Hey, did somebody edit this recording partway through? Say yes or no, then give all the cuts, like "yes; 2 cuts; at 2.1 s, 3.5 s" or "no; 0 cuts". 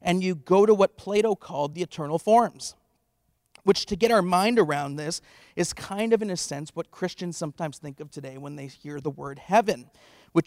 no; 0 cuts